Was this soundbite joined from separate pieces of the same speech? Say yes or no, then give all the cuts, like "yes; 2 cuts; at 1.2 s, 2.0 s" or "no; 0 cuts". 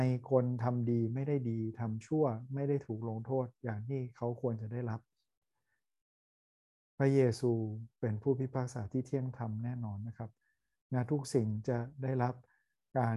no; 0 cuts